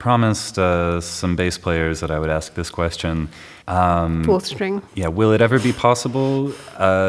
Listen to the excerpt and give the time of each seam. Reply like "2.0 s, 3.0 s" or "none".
3.6 s, 4.9 s